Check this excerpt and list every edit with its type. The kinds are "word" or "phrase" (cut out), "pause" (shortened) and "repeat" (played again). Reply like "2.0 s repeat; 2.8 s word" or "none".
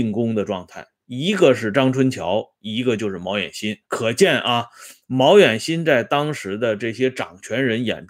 3.8 s pause